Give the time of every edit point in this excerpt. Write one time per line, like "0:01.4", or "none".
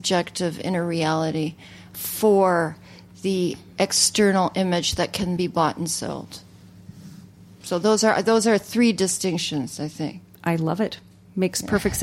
0:05.4